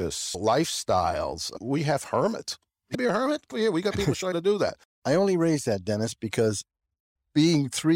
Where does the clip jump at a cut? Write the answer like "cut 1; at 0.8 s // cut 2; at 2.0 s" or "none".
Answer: cut 1; at 2.9 s // cut 2; at 3.5 s // cut 3; at 4.3 s